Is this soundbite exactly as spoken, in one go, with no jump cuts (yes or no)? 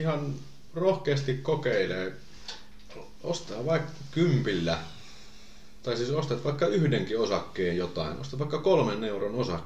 yes